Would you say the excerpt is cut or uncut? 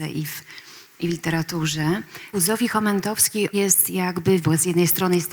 cut